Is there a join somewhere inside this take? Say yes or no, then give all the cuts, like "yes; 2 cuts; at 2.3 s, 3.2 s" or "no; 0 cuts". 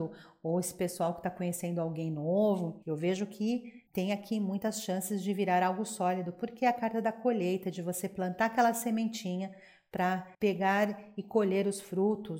yes; 3 cuts; at 2.8 s, 3.9 s, 10.3 s